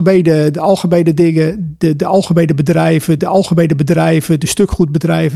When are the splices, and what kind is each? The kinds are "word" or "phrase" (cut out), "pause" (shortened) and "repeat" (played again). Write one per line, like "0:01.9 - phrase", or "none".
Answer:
0:03.2 - repeat